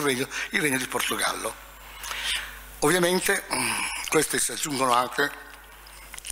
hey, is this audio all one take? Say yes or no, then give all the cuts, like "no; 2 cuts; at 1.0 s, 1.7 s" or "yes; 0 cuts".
no; 1 cut; at 4.1 s